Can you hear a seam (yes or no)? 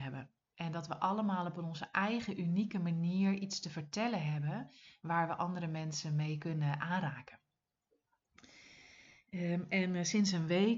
no